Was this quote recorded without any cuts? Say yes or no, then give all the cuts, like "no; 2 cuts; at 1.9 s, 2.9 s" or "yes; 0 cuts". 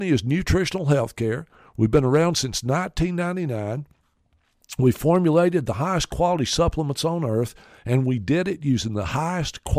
yes; 0 cuts